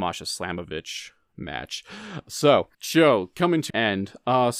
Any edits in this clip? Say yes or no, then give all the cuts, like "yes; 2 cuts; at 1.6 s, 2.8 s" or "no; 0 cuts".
yes; 2 cuts; at 2.7 s, 3.7 s